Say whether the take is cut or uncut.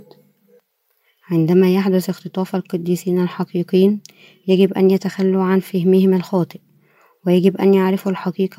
uncut